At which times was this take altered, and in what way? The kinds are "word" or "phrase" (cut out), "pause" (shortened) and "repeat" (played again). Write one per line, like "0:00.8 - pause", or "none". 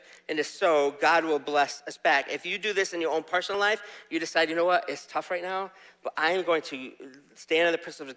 none